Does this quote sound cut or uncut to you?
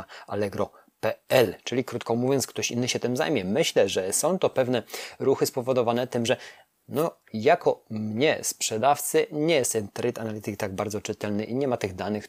uncut